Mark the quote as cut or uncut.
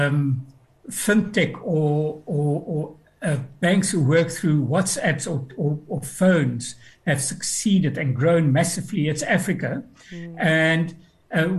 uncut